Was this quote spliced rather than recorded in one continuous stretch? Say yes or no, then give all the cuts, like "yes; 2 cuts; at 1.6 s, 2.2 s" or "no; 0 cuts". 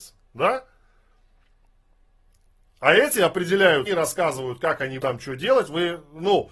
yes; 2 cuts; at 3.9 s, 5.0 s